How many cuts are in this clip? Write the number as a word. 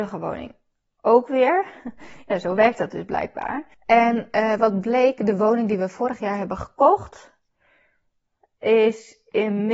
one